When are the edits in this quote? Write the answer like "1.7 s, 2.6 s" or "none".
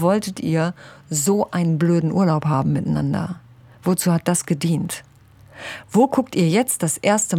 none